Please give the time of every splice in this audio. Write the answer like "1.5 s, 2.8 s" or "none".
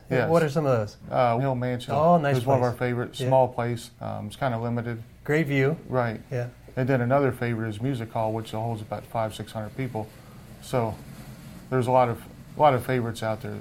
1.4 s, 1.9 s, 4.0 s